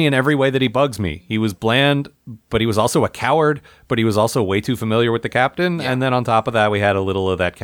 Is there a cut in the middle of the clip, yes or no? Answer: no